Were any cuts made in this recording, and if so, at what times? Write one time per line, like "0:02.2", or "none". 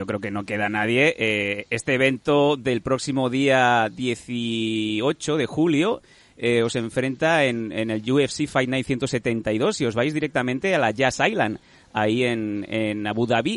none